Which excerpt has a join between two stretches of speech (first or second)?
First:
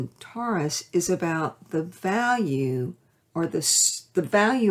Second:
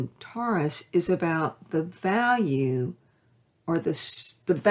first